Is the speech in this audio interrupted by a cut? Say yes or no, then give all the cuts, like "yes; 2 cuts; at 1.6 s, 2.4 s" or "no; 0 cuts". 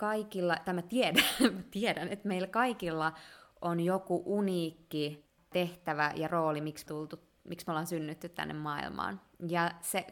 yes; 1 cut; at 6.9 s